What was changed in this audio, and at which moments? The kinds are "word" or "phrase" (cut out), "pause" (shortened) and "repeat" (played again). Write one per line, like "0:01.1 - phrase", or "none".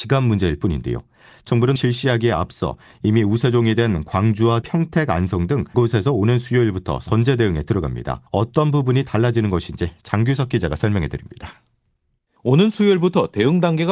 0:01.8 - phrase
0:04.6 - word
0:05.7 - word
0:08.3 - pause